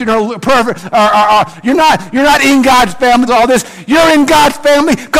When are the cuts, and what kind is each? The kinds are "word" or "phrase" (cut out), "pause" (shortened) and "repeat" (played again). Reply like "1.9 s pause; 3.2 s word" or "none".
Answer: 3.3 s word